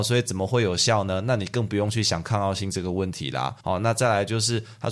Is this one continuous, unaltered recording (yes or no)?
no